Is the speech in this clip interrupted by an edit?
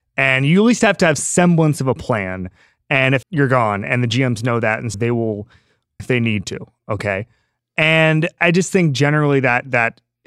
yes; 5 cuts; at 1.2 s, 3.2 s, 4.9 s, 6.0 s, 8.4 s

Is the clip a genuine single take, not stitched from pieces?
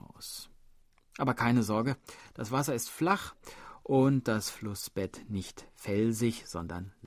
yes; 0 cuts

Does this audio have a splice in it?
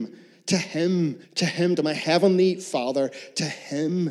yes; 1 cut; at 1.2 s

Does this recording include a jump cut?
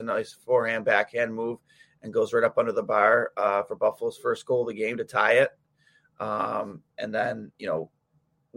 no; 0 cuts

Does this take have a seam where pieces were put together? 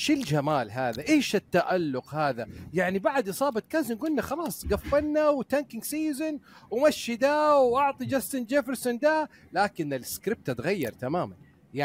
no; 0 cuts

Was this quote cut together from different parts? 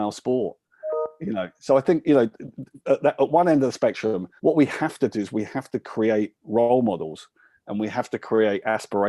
yes; 1 cut; at 4.4 s

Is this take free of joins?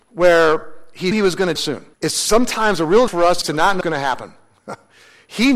no; 6 cuts; at 1.1 s, 1.6 s, 1.9 s, 3.1 s, 3.4 s, 3.8 s

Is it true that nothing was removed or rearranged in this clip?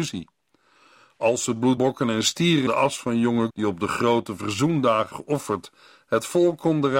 no; 4 cuts; at 1.8 s, 2.7 s, 3.5 s, 5.1 s

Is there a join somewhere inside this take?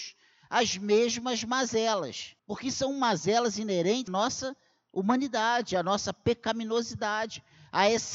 yes; 2 cuts; at 2.4 s, 4.1 s

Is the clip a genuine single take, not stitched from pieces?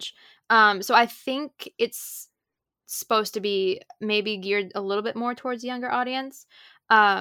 yes; 0 cuts

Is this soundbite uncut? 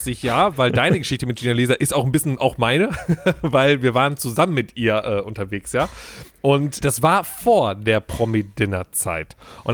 no; 1 cut; at 6.8 s

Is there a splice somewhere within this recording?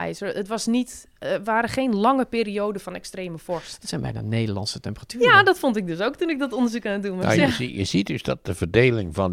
no; 0 cuts

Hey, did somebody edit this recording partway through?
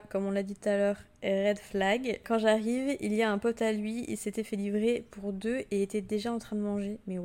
no; 0 cuts

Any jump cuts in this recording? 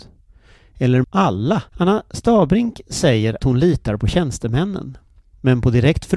yes; 3 cuts; at 1.0 s, 1.7 s, 3.4 s

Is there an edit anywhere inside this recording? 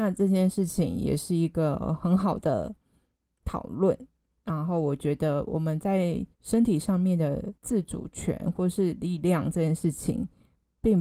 yes; 2 cuts; at 6.3 s, 7.6 s

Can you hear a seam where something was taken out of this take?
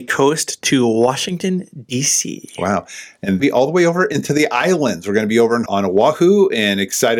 yes; 2 cuts; at 3.4 s, 5.7 s

